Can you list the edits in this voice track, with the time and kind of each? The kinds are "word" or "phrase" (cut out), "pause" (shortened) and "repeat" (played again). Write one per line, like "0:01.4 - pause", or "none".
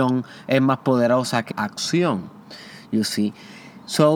0:01.5 - word